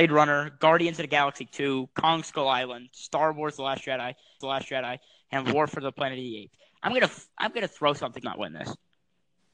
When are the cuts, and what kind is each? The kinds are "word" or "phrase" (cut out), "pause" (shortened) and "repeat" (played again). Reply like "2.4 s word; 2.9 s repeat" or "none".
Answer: 4.4 s repeat; 8.2 s phrase